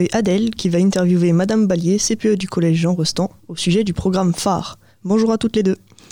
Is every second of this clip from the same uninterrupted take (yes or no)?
yes